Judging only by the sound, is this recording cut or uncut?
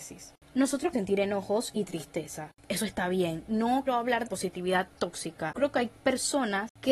cut